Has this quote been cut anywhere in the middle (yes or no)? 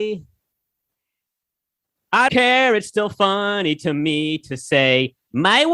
yes